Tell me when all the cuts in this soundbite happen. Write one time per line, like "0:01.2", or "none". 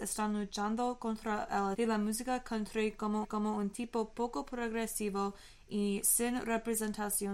0:01.7
0:03.2

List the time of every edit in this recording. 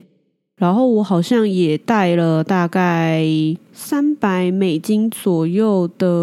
none

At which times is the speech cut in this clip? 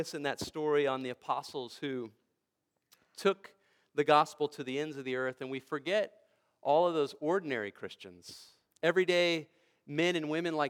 none

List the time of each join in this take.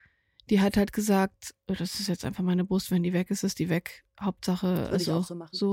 none

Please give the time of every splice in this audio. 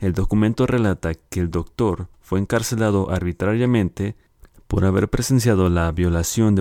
none

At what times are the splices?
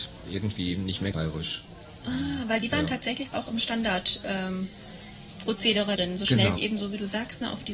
0:01.1
0:03.3
0:06.0
0:06.6

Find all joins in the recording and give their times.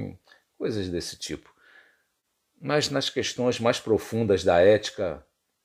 none

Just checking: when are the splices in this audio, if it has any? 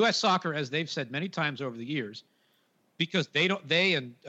none

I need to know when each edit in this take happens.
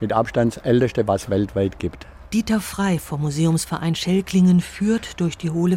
none

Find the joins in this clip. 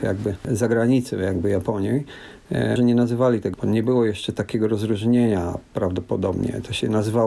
0:02.8
0:03.5

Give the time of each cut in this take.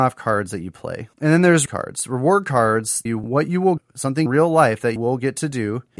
0:01.7
0:03.1
0:03.8
0:04.3
0:05.0

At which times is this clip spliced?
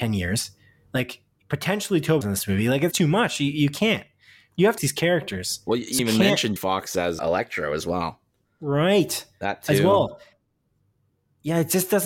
0:02.2
0:02.9
0:04.8
0:06.0
0:06.6
0:07.2

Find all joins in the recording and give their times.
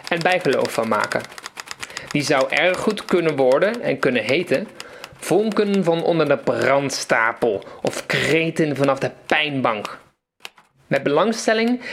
none

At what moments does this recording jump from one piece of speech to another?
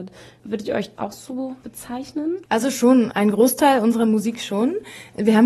0:03.1

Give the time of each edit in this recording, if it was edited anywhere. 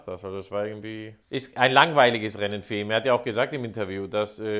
0:01.2

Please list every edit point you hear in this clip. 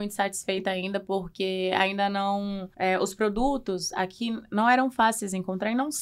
0:02.7

